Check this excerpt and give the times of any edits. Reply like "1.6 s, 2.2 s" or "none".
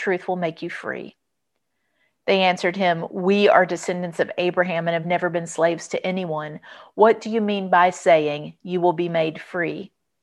none